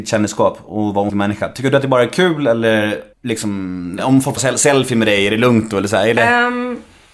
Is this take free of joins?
no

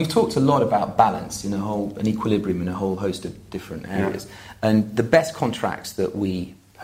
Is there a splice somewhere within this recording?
no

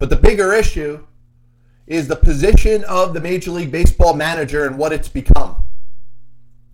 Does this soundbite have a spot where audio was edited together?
no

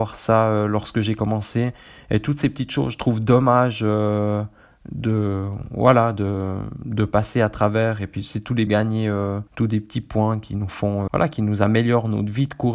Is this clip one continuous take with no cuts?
no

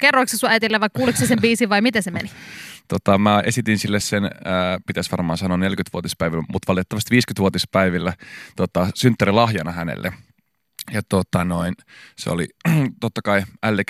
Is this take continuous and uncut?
yes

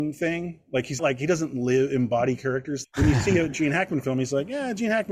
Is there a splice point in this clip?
yes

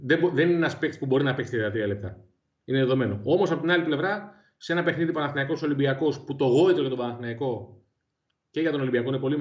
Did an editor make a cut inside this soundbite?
no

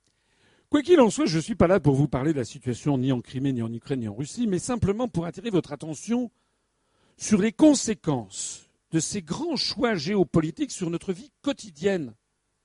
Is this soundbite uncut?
yes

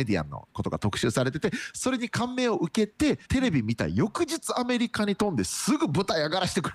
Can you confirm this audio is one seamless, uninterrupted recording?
no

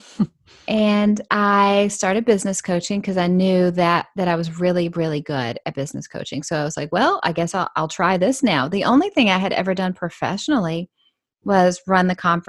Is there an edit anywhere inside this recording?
no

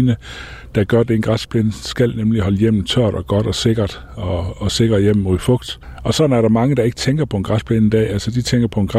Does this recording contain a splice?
no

